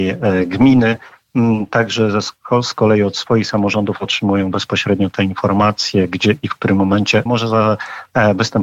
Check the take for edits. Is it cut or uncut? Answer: cut